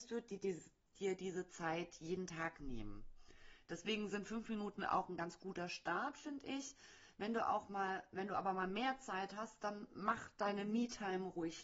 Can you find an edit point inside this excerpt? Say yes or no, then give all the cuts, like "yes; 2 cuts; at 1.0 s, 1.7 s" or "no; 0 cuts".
no; 0 cuts